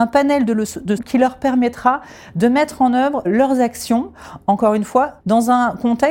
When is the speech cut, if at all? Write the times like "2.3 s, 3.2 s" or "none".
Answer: 1.0 s, 3.2 s, 5.2 s